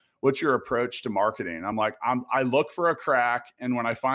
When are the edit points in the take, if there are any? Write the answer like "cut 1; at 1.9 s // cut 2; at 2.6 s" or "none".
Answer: none